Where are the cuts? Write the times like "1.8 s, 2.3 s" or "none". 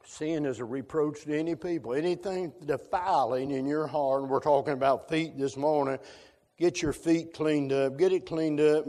none